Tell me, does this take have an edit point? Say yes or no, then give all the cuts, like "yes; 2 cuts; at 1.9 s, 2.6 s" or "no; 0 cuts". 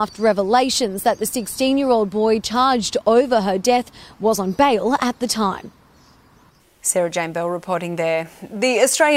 no; 0 cuts